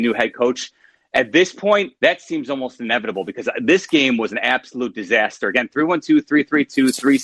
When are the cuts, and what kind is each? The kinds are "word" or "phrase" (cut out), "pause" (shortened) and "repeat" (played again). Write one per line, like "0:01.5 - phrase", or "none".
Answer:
0:02.0 - pause